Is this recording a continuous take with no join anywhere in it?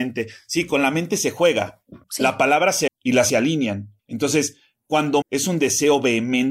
no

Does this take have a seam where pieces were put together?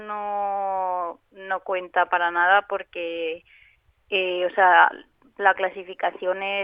no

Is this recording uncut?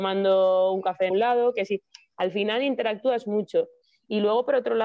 no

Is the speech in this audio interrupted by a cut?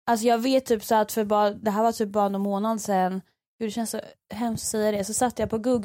no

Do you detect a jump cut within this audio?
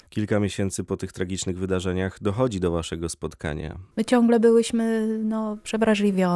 no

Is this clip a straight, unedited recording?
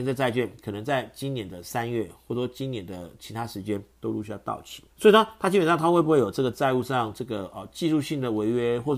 no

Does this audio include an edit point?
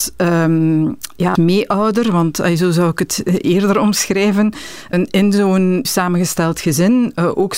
yes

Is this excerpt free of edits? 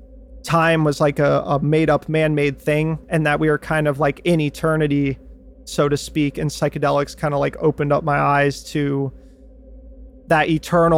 yes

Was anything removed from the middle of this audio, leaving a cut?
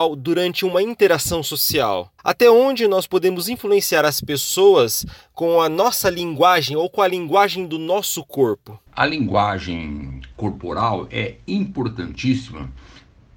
yes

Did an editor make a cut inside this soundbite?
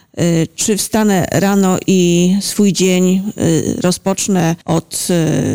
yes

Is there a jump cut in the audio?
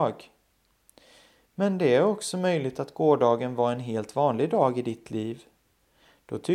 no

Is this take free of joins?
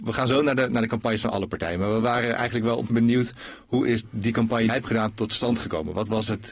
no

